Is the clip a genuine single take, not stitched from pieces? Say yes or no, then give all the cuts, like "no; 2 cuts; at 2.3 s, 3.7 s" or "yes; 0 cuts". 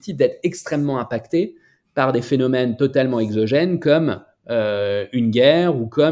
yes; 0 cuts